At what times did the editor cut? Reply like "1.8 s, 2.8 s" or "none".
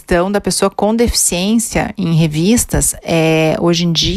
none